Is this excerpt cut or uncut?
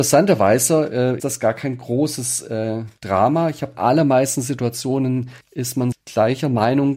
cut